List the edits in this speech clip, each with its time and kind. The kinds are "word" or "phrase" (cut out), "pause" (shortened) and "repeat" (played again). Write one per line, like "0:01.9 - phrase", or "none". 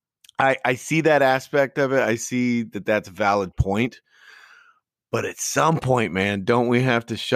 none